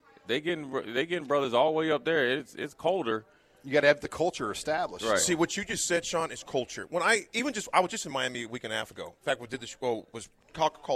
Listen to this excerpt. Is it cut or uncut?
uncut